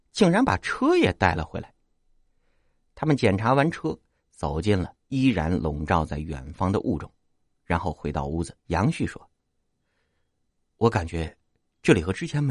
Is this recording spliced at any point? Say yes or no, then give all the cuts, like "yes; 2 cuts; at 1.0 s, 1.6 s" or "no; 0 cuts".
yes; 2 cuts; at 5.0 s, 8.6 s